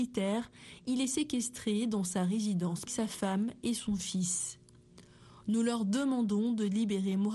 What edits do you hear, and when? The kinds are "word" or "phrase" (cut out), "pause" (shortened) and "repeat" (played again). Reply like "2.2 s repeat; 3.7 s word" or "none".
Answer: 2.9 s phrase